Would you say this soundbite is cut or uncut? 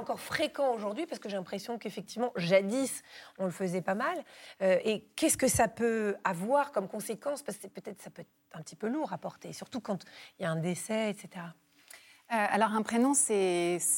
uncut